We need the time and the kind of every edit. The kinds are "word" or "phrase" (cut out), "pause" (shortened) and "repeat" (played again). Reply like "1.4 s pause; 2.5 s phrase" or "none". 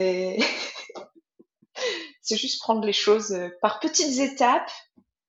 none